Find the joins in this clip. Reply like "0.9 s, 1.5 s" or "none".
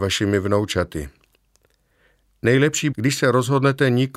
2.9 s